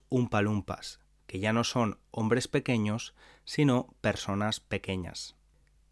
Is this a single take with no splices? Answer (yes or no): yes